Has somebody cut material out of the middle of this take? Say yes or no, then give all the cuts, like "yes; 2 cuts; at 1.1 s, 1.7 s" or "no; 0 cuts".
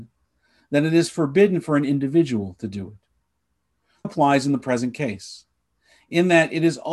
yes; 1 cut; at 4.0 s